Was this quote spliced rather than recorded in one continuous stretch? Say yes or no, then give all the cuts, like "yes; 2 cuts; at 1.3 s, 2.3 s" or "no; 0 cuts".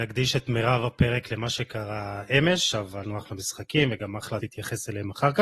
yes; 2 cuts; at 3.0 s, 4.4 s